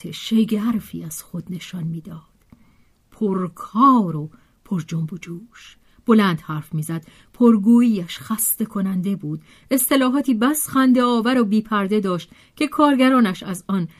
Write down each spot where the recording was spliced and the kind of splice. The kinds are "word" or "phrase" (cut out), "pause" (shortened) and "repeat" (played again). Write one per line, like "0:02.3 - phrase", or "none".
none